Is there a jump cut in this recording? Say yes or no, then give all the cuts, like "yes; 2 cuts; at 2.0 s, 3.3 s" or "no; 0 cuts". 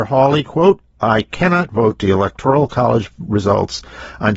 yes; 1 cut; at 2.0 s